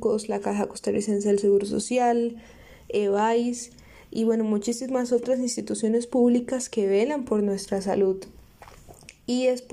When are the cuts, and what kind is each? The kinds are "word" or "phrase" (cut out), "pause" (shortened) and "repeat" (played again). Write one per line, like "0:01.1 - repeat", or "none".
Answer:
none